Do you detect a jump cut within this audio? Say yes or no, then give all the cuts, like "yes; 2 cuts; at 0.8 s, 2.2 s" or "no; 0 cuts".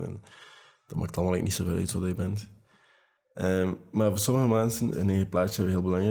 yes; 1 cut; at 4.9 s